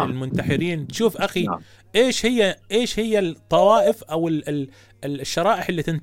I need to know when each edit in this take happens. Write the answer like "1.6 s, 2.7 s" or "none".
none

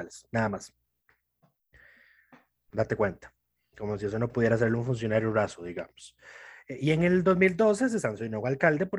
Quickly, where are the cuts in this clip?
none

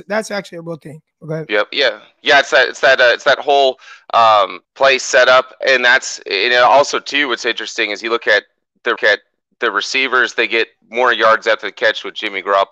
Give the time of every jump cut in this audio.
1.1 s, 4.6 s, 5.6 s, 9.0 s

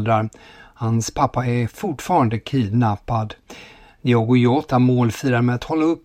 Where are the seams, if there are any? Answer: none

